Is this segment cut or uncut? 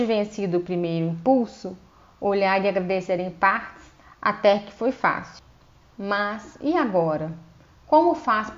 uncut